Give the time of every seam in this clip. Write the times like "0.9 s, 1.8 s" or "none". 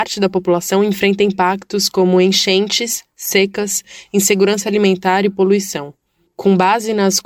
none